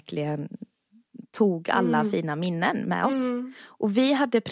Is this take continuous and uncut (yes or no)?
yes